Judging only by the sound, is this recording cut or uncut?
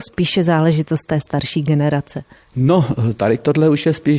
uncut